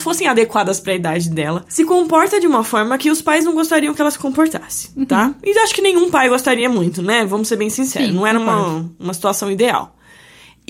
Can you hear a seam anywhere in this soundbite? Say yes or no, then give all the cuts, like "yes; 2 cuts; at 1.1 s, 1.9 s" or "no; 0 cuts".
no; 0 cuts